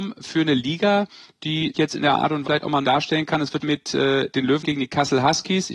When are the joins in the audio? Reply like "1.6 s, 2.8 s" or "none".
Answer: 1.7 s, 2.4 s, 2.8 s, 3.6 s, 4.6 s